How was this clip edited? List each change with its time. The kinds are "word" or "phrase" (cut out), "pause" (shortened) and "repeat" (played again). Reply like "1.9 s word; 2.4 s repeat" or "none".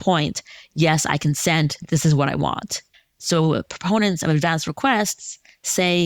2.9 s pause

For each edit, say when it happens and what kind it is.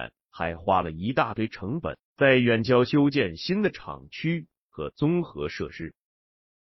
2.0 s pause

